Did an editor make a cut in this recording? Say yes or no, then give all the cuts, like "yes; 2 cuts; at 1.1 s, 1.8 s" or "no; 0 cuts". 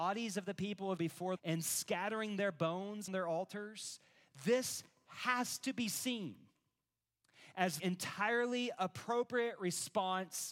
yes; 4 cuts; at 1.0 s, 1.4 s, 3.1 s, 7.8 s